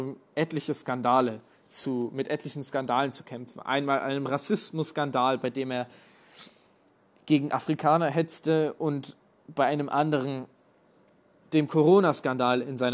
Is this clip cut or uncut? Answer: uncut